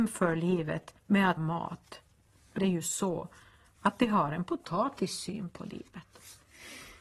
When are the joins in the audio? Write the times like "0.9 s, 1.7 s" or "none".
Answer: 1.0 s, 1.4 s, 2.6 s